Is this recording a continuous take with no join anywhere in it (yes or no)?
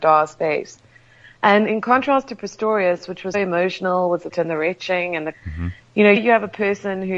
no